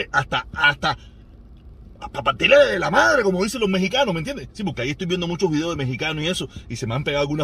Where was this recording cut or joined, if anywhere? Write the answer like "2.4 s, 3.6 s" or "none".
none